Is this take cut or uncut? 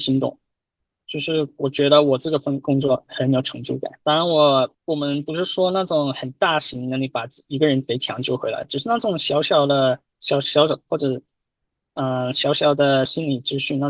cut